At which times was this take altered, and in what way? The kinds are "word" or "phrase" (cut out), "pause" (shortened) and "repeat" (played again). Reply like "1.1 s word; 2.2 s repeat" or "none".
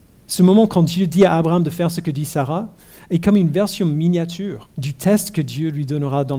4.7 s pause